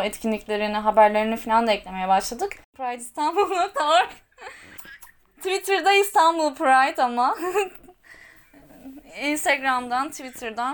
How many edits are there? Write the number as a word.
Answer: one